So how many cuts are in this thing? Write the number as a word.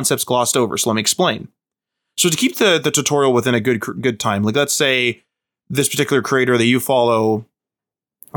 zero